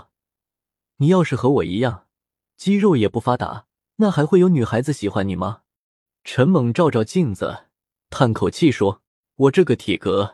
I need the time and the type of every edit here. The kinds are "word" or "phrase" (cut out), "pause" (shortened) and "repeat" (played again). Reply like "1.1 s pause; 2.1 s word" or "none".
3.8 s pause; 9.1 s pause